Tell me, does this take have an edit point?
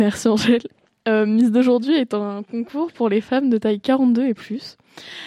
no; 0 cuts

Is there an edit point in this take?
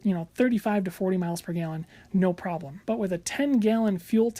yes; 1 cut; at 2.8 s

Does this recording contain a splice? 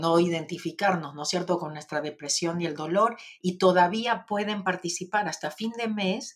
no; 0 cuts

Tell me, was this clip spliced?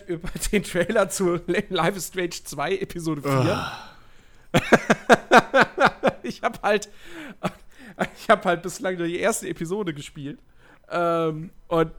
no; 0 cuts

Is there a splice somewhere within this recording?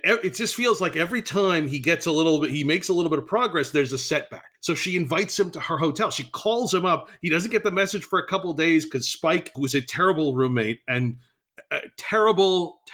yes; 1 cut; at 4.5 s

